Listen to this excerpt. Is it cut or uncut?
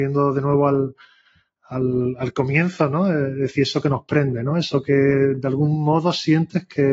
uncut